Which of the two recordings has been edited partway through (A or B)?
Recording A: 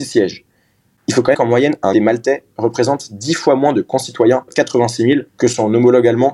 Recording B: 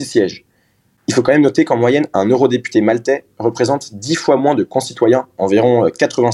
A